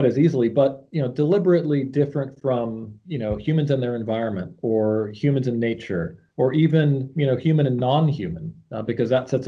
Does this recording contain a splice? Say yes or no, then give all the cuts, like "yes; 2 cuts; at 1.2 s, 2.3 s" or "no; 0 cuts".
yes; 1 cut; at 6.3 s